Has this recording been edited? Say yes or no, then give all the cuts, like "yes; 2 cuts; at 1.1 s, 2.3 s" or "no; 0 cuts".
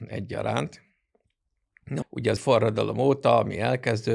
yes; 2 cuts; at 2.0 s, 2.4 s